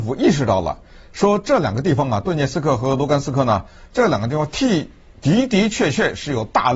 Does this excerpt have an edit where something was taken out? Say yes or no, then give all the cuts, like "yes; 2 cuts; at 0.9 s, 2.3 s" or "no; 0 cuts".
no; 0 cuts